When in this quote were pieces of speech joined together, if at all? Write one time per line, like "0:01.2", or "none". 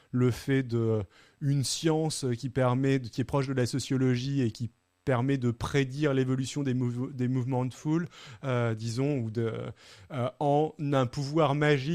none